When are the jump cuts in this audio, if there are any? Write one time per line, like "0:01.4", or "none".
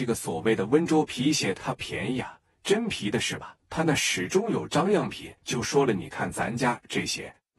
0:03.6
0:05.4